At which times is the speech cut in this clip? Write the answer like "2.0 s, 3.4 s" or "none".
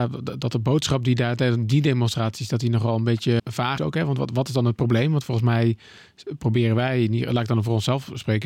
3.4 s, 3.8 s